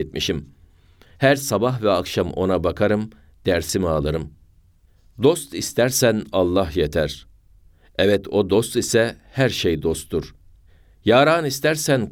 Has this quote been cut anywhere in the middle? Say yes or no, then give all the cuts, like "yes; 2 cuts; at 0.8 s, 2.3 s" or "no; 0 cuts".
no; 0 cuts